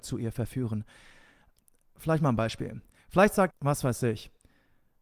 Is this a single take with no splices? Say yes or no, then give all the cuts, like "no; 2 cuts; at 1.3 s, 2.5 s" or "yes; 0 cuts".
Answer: no; 1 cut; at 3.5 s